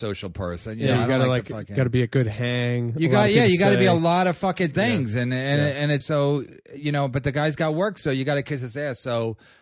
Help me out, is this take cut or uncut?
cut